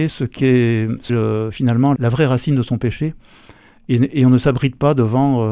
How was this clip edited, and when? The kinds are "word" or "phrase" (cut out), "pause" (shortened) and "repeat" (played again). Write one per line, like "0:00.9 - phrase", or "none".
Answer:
0:01.1 - word
0:02.0 - word